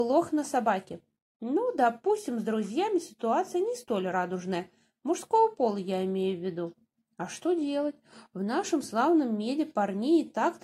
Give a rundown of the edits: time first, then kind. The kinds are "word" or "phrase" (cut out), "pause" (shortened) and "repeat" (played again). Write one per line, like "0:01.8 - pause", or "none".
none